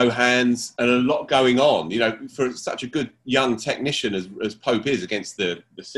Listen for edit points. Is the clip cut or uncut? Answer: uncut